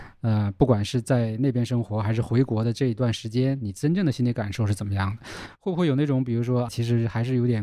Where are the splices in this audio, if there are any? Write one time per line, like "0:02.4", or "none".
0:06.7